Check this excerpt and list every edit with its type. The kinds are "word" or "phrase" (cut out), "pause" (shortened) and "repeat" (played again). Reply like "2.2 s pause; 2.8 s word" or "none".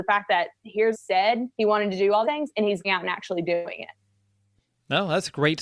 0.9 s phrase; 1.5 s pause; 2.2 s word; 2.8 s word